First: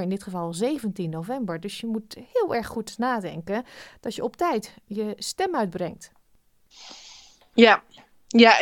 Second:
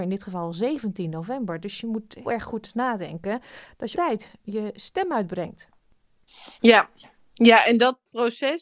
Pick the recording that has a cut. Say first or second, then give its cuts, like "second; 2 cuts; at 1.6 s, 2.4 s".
second; 3 cuts; at 2.2 s, 3.9 s, 6.6 s